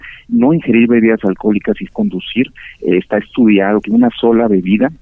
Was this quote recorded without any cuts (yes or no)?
no